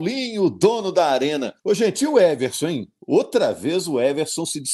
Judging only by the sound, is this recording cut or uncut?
cut